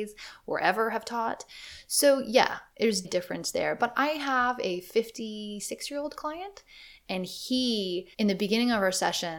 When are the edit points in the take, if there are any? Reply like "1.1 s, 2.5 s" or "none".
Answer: 3.0 s, 8.1 s